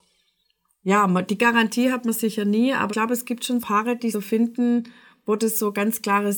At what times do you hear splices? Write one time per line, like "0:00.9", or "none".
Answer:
0:02.9
0:03.6
0:04.1